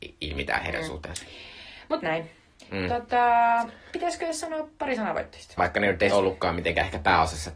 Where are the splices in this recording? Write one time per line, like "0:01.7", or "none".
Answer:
0:05.6
0:06.1